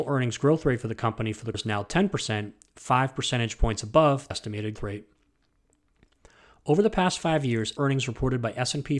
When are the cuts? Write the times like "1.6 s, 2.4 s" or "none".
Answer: 1.5 s, 4.3 s, 4.8 s, 7.8 s